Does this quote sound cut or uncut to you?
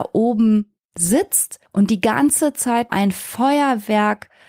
cut